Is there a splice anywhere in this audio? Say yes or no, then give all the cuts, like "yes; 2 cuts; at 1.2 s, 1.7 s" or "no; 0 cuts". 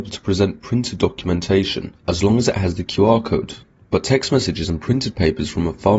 no; 0 cuts